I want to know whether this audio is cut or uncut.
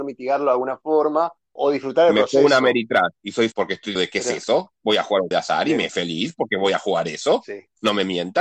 cut